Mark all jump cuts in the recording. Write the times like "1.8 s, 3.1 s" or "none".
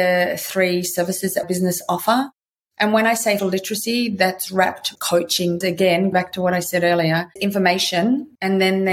1.4 s, 3.4 s, 5.0 s, 5.6 s, 6.1 s, 7.4 s